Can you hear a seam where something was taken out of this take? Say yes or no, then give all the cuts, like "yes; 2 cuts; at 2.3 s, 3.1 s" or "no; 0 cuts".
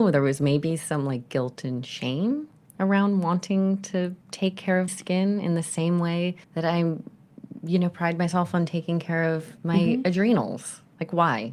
yes; 3 cuts; at 4.2 s, 4.9 s, 6.4 s